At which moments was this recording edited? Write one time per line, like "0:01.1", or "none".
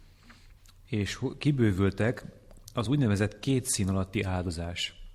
none